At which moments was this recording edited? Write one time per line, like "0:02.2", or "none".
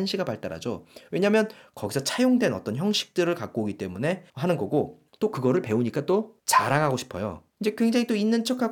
0:04.3
0:05.1
0:06.4
0:07.5